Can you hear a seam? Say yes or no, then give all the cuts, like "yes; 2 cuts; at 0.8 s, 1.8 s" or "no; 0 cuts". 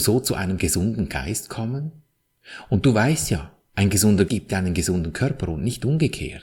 yes; 1 cut; at 4.3 s